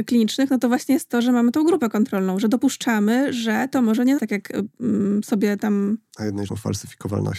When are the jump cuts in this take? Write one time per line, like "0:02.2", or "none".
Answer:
0:04.2
0:06.5